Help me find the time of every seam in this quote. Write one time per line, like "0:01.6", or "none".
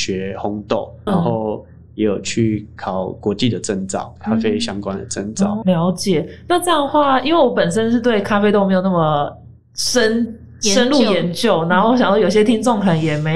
0:01.1
0:05.6